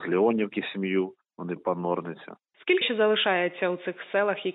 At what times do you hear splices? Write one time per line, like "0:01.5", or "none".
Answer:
0:01.6
0:02.8